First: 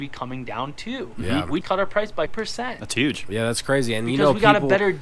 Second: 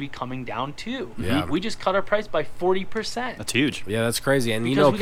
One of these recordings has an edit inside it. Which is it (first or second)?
first